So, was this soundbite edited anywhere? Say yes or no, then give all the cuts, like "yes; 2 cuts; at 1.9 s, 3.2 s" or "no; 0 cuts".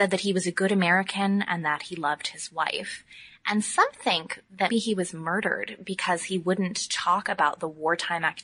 yes; 1 cut; at 4.7 s